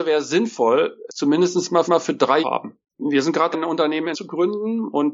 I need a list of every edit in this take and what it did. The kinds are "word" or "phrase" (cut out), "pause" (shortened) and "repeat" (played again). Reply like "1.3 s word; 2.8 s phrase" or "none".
1.1 s word; 1.9 s repeat; 2.4 s phrase; 2.9 s pause; 3.5 s word; 4.1 s word

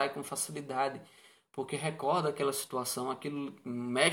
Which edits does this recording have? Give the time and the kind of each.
none

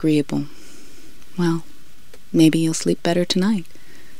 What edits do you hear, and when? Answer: none

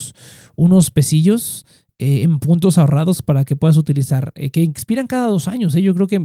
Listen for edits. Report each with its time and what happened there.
none

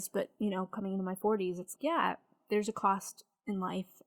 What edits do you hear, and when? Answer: 1.7 s word

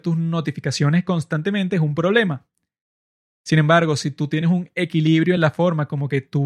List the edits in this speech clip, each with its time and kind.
none

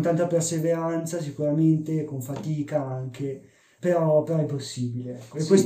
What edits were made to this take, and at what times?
3.8 s word

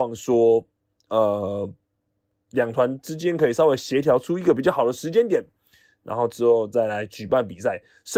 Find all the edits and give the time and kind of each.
none

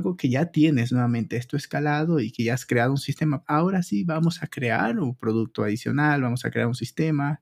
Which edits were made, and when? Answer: 3.4 s word

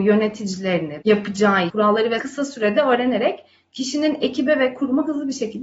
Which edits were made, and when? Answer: 1.0 s word; 1.7 s word; 2.2 s word

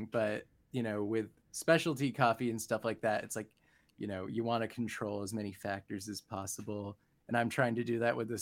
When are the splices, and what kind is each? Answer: none

